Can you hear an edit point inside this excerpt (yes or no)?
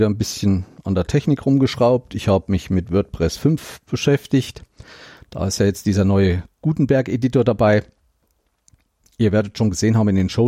no